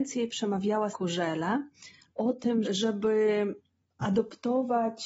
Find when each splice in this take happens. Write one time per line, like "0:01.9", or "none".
0:00.9
0:02.1
0:02.6